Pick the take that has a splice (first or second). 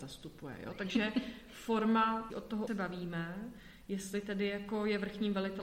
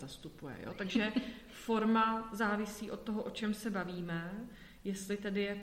first